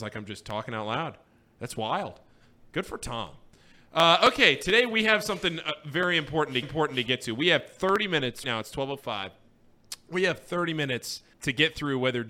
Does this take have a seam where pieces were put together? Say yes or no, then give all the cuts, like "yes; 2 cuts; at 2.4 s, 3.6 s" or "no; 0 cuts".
yes; 3 cuts; at 6.6 s, 8.4 s, 11.3 s